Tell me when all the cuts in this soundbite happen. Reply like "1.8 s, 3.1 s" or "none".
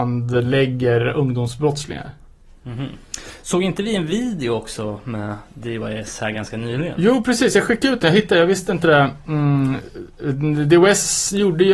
none